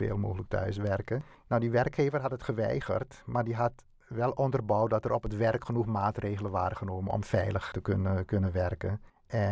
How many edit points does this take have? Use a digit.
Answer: 1